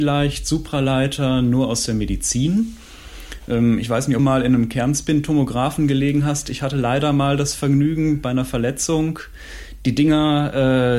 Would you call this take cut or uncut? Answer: cut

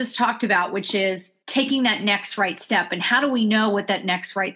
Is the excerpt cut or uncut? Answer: cut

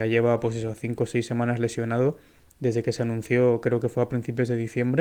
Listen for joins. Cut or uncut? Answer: uncut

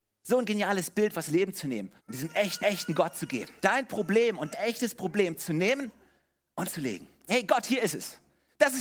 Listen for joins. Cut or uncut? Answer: cut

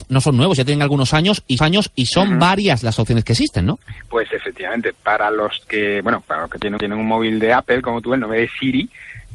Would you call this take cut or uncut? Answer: cut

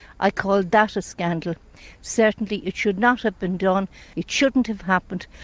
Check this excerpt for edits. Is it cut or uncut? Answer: cut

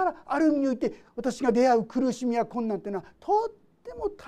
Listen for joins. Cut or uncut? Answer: cut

